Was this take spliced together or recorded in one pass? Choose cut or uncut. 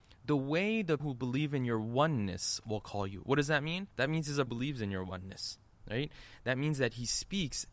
cut